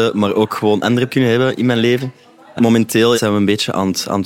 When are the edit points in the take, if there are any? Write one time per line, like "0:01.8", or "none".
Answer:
0:01.1
0:03.1